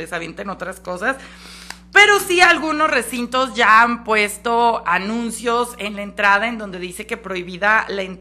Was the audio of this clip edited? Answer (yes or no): no